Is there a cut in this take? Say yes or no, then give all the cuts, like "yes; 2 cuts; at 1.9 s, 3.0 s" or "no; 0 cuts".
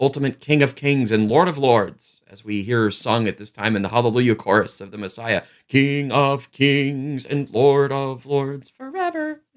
no; 0 cuts